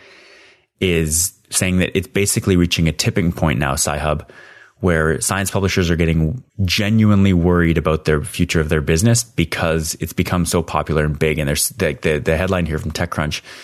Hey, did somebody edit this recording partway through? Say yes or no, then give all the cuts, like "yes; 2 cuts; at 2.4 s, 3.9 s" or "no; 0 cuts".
no; 0 cuts